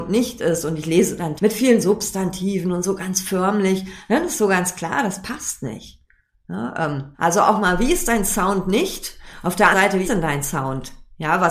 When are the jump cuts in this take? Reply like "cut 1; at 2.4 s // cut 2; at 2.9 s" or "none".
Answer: cut 1; at 1.4 s // cut 2; at 7.1 s // cut 3; at 9.7 s // cut 4; at 10.0 s